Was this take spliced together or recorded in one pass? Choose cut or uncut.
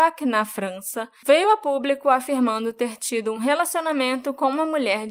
uncut